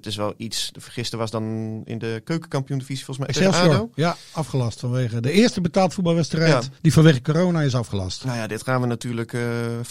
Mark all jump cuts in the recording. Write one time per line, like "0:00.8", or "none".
0:03.3
0:06.8